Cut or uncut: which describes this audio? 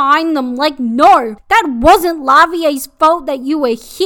uncut